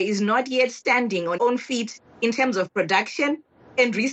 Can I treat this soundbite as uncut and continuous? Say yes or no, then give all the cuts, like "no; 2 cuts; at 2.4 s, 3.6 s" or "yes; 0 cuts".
no; 1 cut; at 1.4 s